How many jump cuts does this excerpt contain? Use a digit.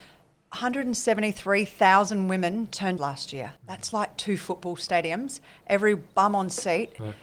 2